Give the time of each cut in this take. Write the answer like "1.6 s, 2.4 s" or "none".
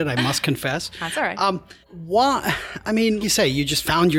1.8 s, 3.2 s